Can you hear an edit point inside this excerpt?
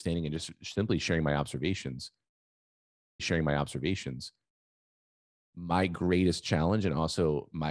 yes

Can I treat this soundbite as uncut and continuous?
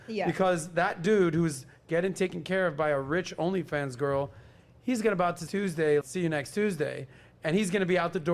no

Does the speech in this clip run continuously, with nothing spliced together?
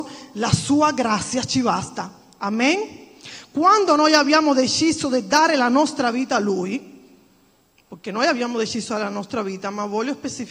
yes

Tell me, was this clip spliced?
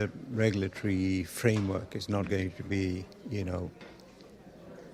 no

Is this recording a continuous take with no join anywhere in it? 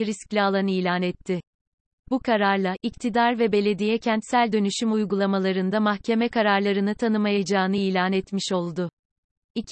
yes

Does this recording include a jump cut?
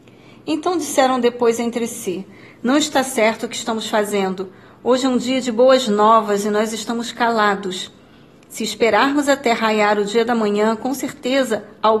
no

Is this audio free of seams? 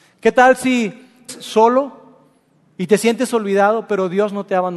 no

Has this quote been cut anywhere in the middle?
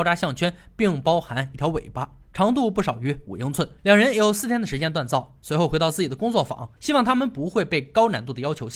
yes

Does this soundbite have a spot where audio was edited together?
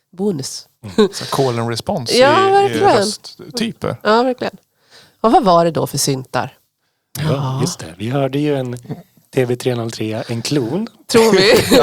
no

